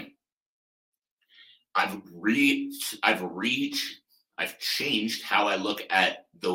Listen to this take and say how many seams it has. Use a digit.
0